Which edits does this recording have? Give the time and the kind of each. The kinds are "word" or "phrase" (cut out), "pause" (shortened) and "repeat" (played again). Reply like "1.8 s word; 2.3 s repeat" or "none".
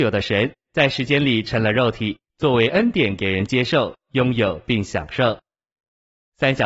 none